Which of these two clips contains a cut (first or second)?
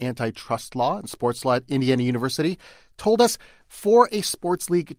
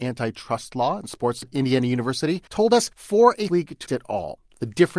second